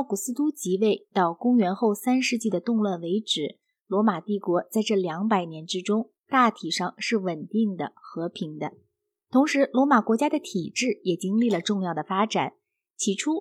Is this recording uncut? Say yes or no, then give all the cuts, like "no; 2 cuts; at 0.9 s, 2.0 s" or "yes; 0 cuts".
yes; 0 cuts